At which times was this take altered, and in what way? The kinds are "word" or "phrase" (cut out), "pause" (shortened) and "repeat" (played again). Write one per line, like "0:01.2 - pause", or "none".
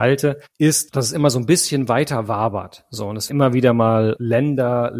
0:03.3 - word